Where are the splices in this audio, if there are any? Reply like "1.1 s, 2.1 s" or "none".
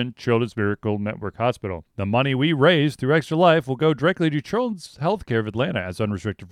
1.9 s